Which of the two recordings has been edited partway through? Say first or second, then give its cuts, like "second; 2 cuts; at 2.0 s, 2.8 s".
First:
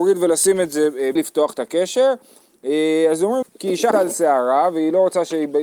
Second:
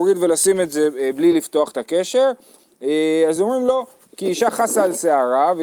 first; 3 cuts; at 1.2 s, 3.4 s, 3.9 s